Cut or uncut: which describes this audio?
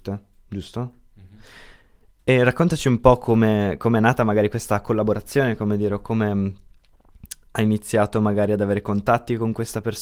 uncut